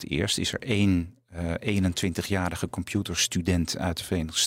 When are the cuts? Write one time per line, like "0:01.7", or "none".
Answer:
none